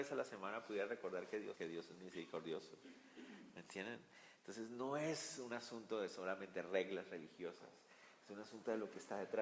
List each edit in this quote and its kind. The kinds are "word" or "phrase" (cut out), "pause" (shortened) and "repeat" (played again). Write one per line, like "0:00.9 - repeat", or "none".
0:01.5 - phrase